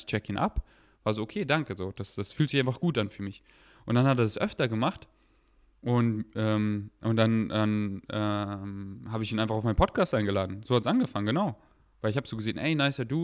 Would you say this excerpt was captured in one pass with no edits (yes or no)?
yes